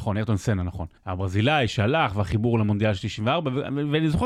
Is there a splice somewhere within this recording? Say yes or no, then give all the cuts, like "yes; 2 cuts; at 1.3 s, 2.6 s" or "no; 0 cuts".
yes; 1 cut; at 1.0 s